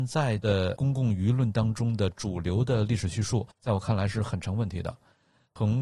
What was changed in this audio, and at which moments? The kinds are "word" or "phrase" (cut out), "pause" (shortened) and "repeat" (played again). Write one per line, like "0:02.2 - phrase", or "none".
0:03.5 - pause